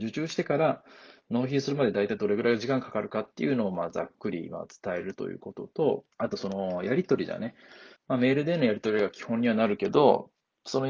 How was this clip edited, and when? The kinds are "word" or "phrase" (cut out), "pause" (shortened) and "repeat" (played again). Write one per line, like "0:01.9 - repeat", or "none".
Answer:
0:06.1 - pause
0:08.0 - pause

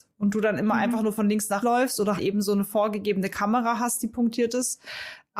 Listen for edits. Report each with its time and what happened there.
0:01.6 - word
0:02.2 - word

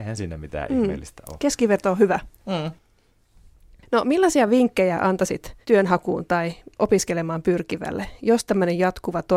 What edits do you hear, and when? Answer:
0:02.4 - pause
0:05.6 - pause

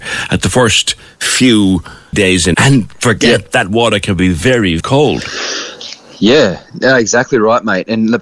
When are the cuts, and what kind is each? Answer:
0:02.1 - word
0:02.5 - word
0:04.8 - word
0:06.7 - pause

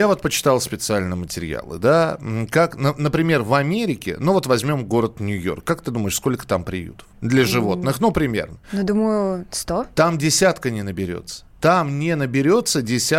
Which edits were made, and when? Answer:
0:07.1 - pause
0:08.6 - pause
0:11.5 - pause

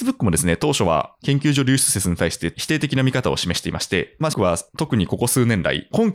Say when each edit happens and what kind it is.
0:04.3 - word

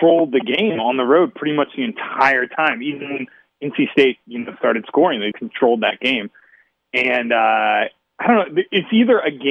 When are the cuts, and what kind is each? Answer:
0:05.3 - word

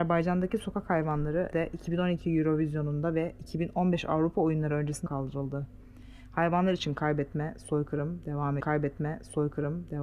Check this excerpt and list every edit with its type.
0:01.5 - word
0:05.1 - word
0:08.6 - repeat

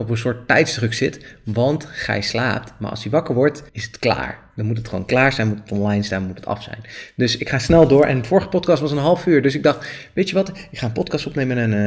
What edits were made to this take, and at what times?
0:03.7 - pause

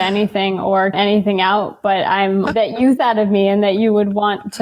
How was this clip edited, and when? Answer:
0:00.9 - word
0:02.5 - word
0:03.0 - word

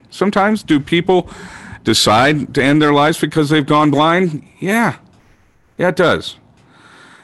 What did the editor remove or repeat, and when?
0:02.5 - word

